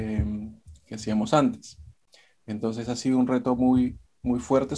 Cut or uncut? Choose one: uncut